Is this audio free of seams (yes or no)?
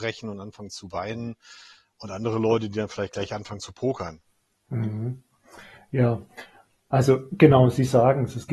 yes